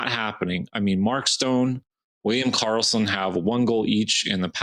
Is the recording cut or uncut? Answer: uncut